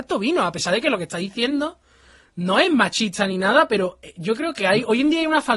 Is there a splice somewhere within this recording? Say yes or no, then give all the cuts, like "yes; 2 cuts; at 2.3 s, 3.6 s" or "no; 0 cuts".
no; 0 cuts